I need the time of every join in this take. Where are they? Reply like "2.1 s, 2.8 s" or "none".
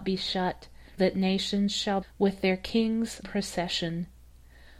1.0 s, 2.0 s, 3.2 s